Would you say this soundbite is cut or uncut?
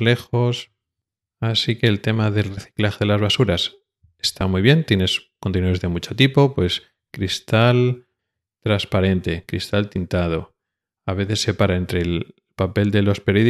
uncut